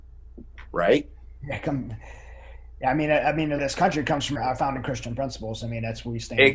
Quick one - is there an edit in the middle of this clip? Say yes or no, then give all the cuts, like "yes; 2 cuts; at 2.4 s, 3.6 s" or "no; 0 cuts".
yes; 2 cuts; at 3.6 s, 4.4 s